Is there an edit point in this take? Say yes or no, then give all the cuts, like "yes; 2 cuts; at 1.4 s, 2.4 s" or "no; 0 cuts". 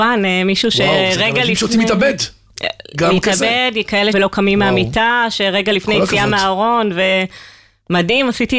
yes; 1 cut; at 4.1 s